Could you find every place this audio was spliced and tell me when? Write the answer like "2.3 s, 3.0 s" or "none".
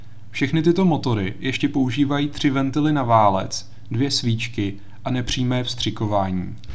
none